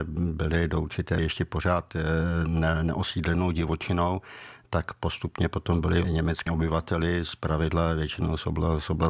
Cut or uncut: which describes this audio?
cut